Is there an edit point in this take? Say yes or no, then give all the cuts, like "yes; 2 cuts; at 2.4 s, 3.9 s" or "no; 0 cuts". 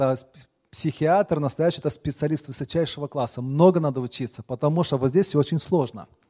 no; 0 cuts